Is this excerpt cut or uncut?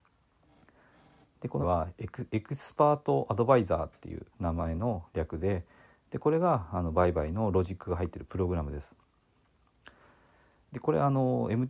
cut